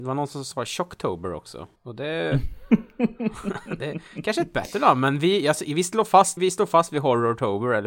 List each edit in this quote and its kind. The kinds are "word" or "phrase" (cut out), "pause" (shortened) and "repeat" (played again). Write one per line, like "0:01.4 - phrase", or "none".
0:01.8 - pause
0:06.4 - word